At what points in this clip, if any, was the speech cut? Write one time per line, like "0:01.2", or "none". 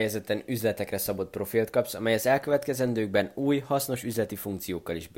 none